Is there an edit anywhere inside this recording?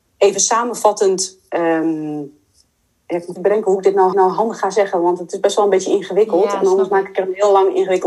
yes; 3 cuts; at 2.8 s, 3.4 s, 4.1 s

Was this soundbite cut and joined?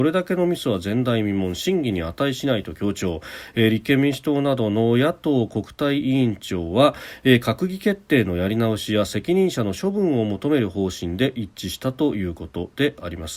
no; 0 cuts

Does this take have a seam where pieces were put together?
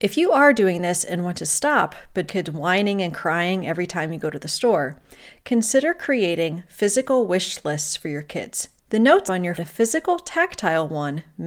yes; 4 cuts; at 2.3 s, 8.8 s, 9.3 s, 9.6 s

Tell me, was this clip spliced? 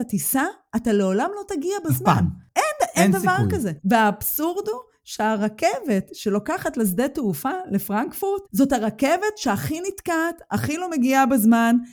yes; 2 cuts; at 3.8 s, 8.5 s

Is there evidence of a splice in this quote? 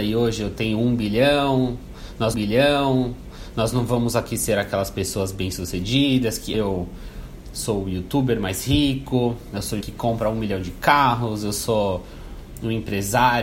yes; 3 cuts; at 2.3 s, 6.5 s, 9.8 s

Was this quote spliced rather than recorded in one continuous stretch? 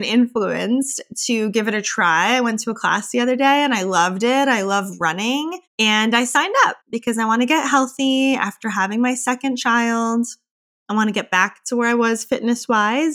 yes; 2 cuts; at 5.7 s, 6.8 s

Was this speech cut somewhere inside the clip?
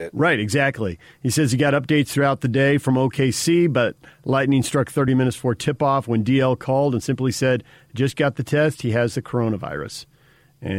no; 0 cuts

